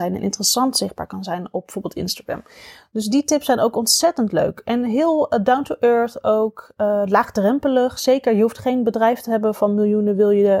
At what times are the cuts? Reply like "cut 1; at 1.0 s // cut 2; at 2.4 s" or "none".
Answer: none